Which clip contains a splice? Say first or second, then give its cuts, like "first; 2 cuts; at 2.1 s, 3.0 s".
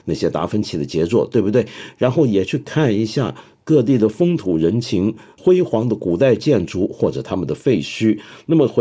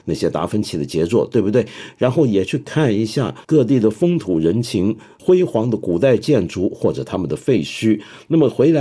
second; 1 cut; at 3.4 s